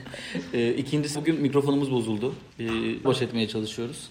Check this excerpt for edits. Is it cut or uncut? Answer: cut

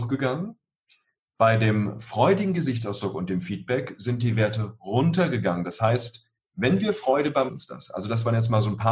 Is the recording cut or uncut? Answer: cut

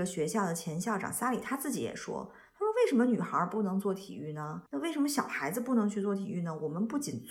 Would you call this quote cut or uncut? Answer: cut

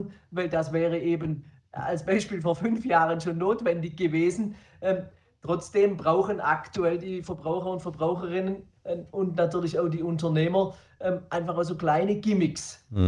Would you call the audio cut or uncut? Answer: uncut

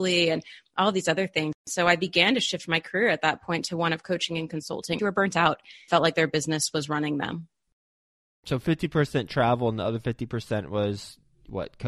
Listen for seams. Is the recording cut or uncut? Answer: cut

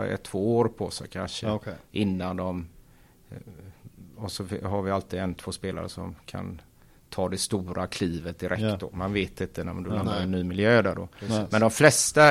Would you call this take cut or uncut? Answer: uncut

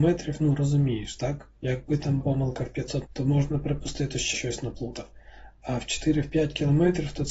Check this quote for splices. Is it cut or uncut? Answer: cut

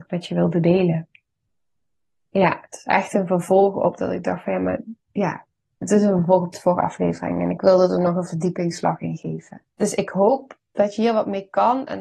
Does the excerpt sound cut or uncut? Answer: cut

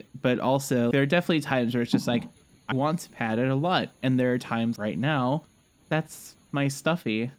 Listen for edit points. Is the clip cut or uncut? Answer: cut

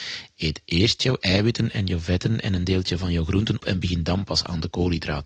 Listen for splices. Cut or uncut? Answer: cut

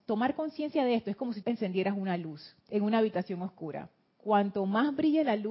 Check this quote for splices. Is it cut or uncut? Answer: cut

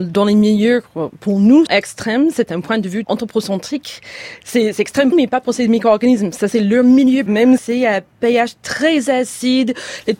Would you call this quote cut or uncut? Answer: cut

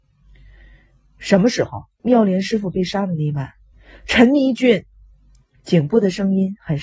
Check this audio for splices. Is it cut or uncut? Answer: cut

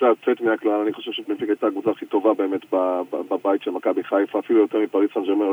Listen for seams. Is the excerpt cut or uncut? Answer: uncut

